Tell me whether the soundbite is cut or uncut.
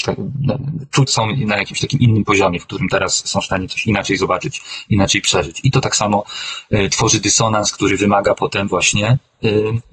cut